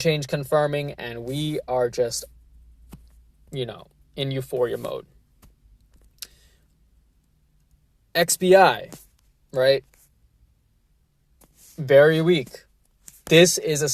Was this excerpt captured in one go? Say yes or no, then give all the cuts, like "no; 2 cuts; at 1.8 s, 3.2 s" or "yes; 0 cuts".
yes; 0 cuts